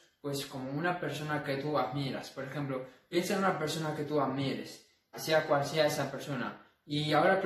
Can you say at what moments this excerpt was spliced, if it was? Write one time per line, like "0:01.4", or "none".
0:05.1